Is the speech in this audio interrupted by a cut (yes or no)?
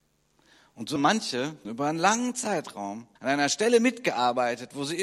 yes